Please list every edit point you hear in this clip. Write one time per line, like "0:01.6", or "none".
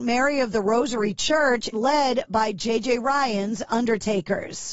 0:01.7